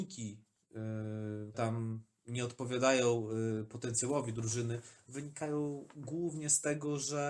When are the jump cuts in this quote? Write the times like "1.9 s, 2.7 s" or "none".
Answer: 1.5 s